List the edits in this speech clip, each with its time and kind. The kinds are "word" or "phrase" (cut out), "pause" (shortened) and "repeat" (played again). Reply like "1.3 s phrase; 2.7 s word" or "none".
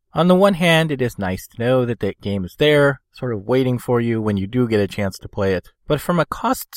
5.7 s pause